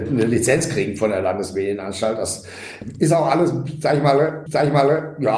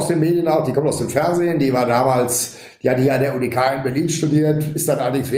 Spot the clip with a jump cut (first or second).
first